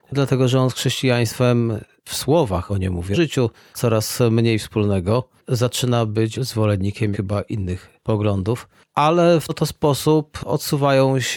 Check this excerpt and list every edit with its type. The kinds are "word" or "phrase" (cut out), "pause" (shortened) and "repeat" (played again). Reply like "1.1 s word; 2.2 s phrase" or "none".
2.7 s word; 3.1 s word; 3.7 s word; 6.3 s word; 7.1 s word; 9.5 s word